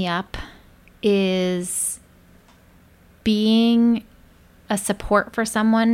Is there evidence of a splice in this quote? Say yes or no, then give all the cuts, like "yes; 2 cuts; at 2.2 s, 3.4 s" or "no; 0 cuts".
no; 0 cuts